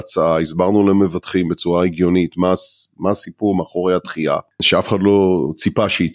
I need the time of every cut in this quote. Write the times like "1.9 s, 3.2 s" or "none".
none